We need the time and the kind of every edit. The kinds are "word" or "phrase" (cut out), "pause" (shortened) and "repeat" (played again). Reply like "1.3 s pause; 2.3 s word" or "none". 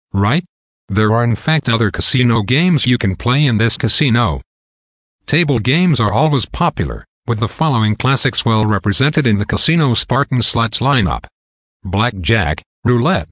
3.8 s word